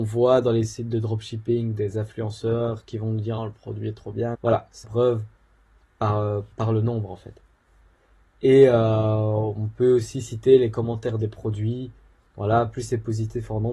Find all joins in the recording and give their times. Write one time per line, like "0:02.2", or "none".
0:03.4
0:04.3
0:04.8
0:06.5

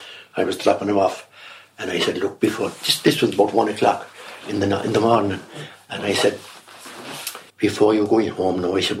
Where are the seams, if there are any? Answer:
0:07.5

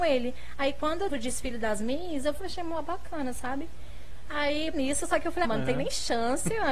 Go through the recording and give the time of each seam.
0:01.1
0:02.4
0:04.7
0:05.4

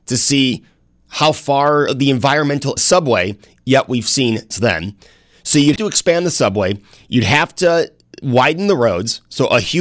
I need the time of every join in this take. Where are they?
0:01.9
0:02.8
0:04.5
0:05.8

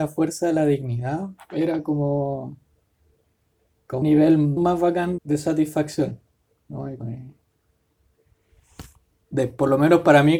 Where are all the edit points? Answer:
0:04.0
0:04.6
0:05.2
0:07.0

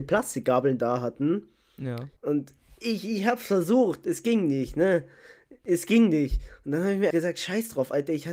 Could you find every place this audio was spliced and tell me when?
0:02.2
0:07.1

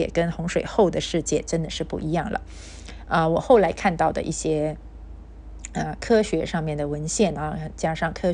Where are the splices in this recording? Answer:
none

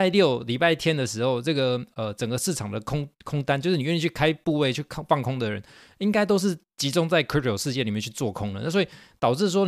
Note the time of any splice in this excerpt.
none

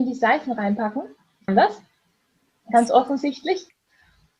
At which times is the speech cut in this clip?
0:01.5

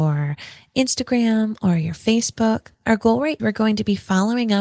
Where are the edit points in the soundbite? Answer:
0:02.7
0:03.4

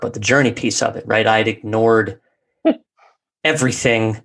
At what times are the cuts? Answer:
none

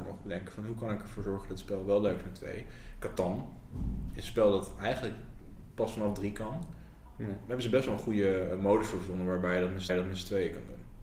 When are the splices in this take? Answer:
0:09.9

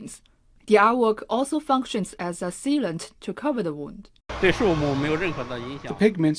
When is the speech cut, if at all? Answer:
0:04.2

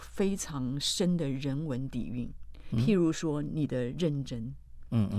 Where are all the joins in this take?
0:02.7

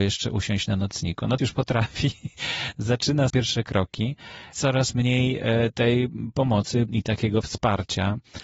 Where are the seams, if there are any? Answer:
0:01.4
0:03.3
0:04.5
0:06.9

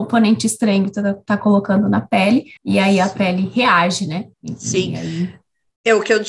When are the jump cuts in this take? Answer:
0:02.6
0:04.3

